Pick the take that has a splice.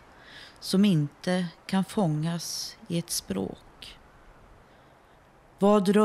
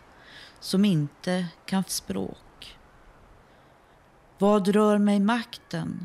second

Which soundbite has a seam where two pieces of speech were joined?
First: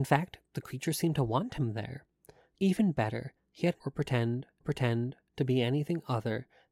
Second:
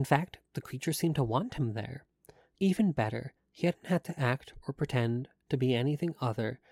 first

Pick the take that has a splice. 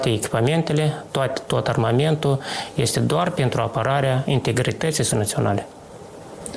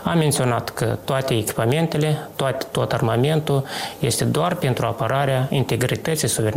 first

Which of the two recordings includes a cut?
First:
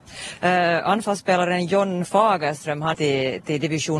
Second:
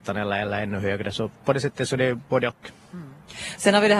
first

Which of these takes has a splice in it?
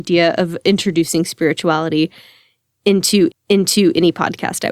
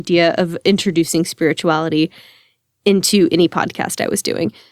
first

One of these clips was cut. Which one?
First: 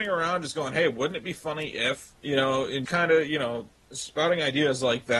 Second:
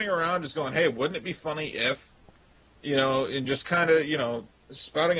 first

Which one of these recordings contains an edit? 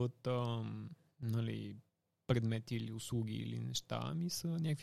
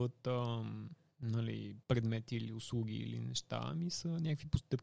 second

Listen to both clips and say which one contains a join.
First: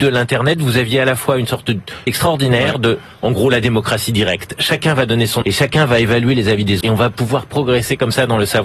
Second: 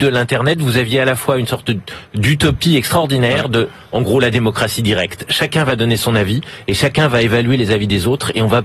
first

